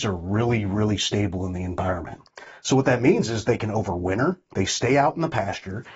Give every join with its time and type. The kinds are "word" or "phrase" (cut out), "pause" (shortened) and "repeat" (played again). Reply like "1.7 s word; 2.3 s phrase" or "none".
none